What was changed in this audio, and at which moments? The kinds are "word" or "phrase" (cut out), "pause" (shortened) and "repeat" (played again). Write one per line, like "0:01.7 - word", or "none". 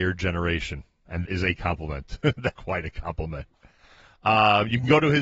0:01.3 - word
0:02.5 - word